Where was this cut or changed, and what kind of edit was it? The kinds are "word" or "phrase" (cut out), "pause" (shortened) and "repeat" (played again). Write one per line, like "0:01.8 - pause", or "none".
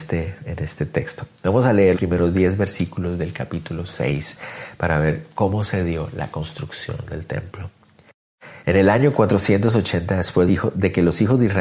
0:01.9 - word
0:08.6 - pause
0:10.5 - phrase

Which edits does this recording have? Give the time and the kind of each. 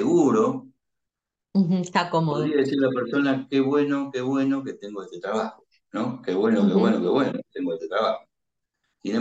none

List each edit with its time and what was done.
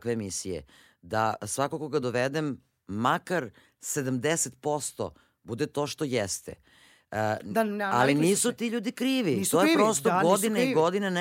none

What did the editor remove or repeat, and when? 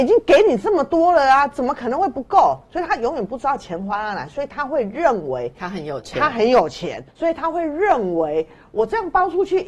0:07.1 - pause

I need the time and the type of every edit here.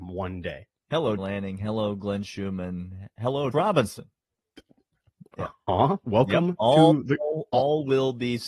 0:01.2 - word
0:03.5 - word

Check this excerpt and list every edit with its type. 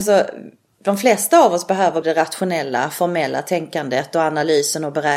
0:02.0 - word

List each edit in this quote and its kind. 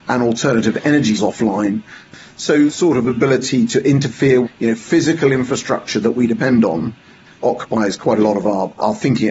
0:01.2 - word
0:02.7 - word
0:04.4 - word

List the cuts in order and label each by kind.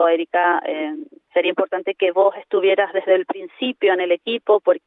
none

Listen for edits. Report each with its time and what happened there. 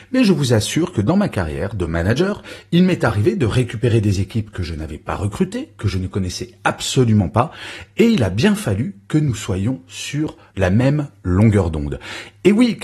none

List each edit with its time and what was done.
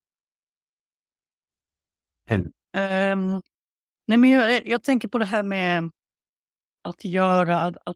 none

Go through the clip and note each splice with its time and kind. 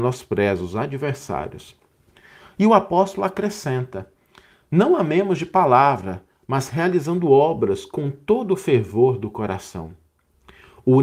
none

